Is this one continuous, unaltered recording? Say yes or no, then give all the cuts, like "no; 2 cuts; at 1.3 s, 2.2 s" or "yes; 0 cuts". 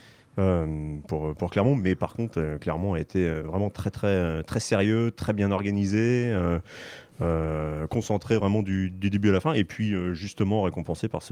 yes; 0 cuts